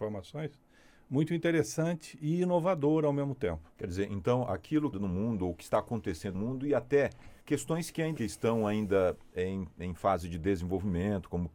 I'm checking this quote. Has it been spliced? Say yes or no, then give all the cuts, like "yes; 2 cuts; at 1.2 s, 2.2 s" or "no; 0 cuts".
yes; 5 cuts; at 3.7 s, 4.9 s, 6.3 s, 7.4 s, 8.2 s